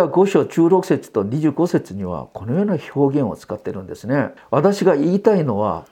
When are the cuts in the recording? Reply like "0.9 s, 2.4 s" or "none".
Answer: 4.4 s